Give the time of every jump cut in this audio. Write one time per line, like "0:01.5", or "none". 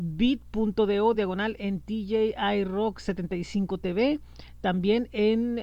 none